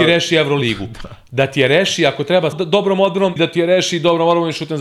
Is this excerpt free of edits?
no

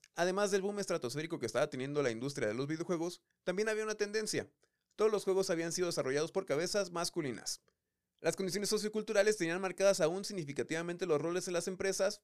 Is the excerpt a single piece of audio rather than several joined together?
yes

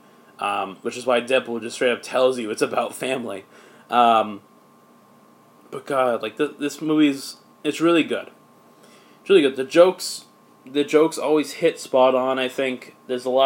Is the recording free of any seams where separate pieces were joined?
yes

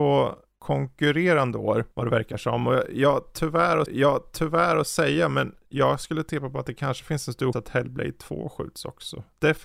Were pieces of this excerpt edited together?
yes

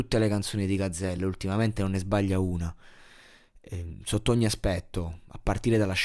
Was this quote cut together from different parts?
no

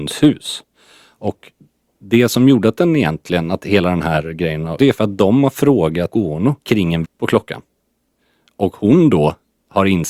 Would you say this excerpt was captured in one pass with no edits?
no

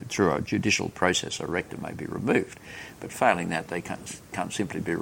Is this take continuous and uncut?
yes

